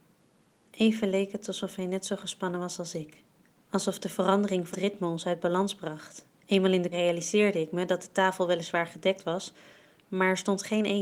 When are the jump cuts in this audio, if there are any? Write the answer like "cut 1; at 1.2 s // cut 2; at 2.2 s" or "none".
cut 1; at 3.4 s // cut 2; at 4.7 s // cut 3; at 6.3 s // cut 4; at 6.9 s